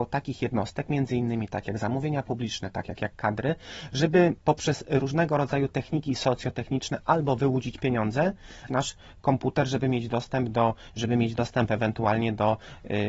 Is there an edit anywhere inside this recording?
yes; 4 cuts; at 3.0 s, 4.4 s, 8.7 s, 10.9 s

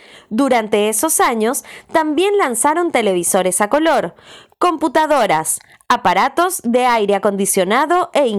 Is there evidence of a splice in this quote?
no; 0 cuts

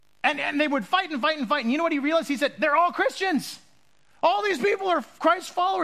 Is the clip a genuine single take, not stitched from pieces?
yes; 0 cuts

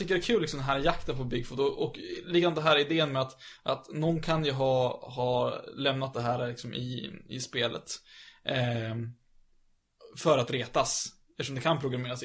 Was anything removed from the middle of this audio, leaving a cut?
no; 0 cuts

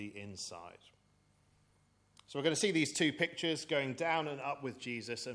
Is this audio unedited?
yes; 0 cuts

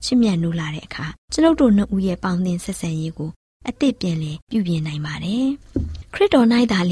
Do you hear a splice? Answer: yes; 2 cuts; at 1.2 s, 4.4 s

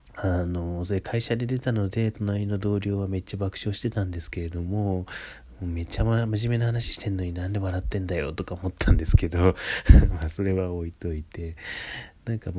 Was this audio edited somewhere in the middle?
no; 0 cuts

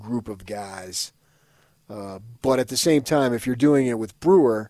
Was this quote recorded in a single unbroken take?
yes; 0 cuts

